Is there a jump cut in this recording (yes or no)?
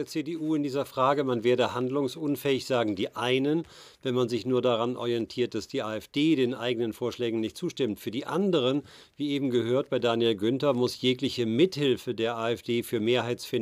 no